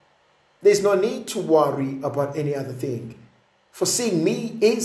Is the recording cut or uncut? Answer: uncut